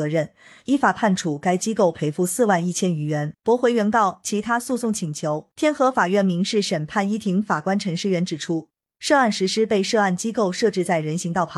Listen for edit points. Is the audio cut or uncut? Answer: cut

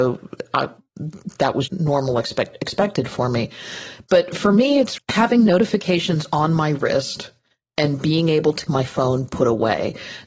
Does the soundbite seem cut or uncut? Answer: cut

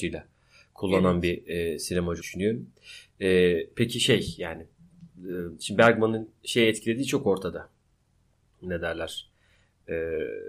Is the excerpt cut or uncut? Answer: cut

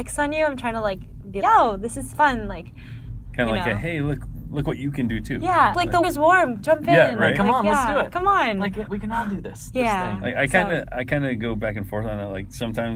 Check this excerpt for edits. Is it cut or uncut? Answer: cut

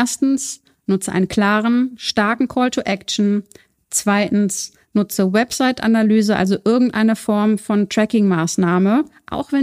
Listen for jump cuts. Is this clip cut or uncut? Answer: uncut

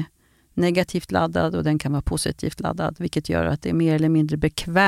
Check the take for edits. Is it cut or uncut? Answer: uncut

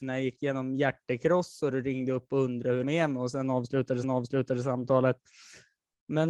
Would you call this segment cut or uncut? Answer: cut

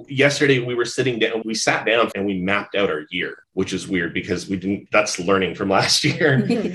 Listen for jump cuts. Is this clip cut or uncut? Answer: cut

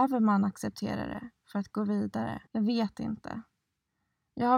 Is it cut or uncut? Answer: cut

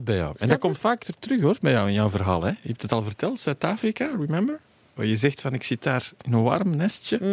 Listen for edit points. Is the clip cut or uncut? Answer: uncut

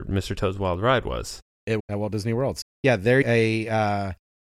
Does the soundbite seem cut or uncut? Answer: cut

